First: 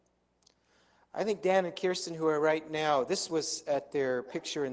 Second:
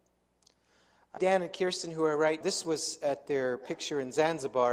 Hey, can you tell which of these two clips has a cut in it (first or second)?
second